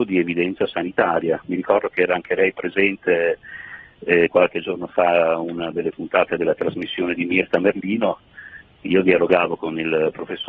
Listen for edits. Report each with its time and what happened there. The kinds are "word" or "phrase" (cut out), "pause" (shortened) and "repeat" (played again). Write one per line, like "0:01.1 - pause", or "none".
none